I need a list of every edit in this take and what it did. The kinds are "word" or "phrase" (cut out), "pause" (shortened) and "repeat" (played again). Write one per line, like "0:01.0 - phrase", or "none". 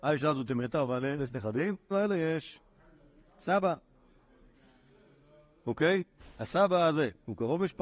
0:01.2 - word
0:01.9 - word